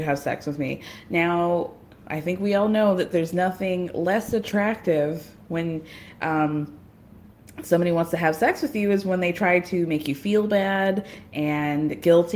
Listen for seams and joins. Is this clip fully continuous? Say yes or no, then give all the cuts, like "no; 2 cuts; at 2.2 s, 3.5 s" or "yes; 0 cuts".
yes; 0 cuts